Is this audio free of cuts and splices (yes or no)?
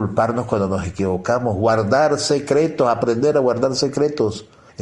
yes